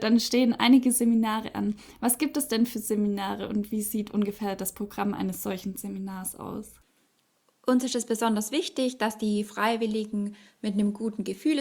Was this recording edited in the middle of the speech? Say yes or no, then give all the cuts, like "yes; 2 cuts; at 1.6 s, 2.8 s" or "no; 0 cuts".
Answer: no; 0 cuts